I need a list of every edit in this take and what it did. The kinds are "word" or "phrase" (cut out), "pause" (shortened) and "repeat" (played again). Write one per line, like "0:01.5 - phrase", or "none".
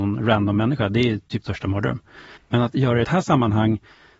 0:01.4 - word
0:02.4 - pause
0:03.0 - phrase